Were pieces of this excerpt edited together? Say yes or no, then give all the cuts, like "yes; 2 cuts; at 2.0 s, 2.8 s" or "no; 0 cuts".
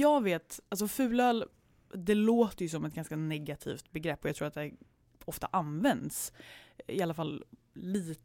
no; 0 cuts